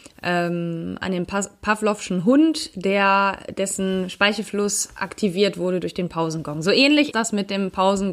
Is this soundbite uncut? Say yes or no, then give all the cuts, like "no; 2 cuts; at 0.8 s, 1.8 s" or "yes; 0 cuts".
no; 1 cut; at 7.1 s